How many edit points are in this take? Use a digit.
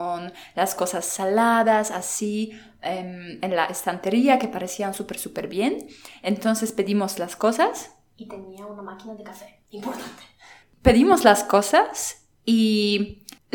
0